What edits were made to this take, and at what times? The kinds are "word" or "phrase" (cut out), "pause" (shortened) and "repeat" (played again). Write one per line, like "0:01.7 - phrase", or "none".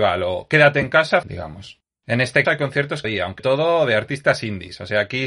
0:01.2 - word
0:02.4 - word
0:03.0 - word
0:03.4 - word